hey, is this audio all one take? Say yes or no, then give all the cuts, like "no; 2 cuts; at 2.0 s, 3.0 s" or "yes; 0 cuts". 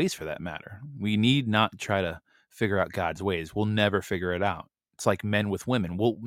yes; 0 cuts